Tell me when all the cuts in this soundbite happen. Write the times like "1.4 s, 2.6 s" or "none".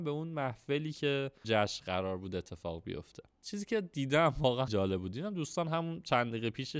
1.4 s, 3.3 s, 4.7 s